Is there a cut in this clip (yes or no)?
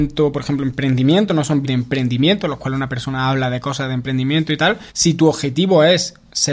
yes